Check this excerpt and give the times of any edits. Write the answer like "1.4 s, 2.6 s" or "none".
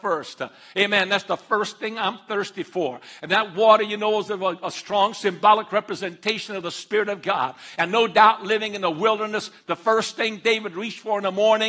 none